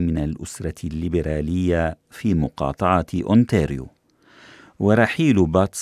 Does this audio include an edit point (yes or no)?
no